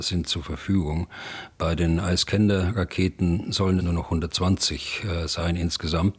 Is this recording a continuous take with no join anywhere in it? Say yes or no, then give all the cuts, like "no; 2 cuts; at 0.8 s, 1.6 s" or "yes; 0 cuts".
no; 1 cut; at 3.8 s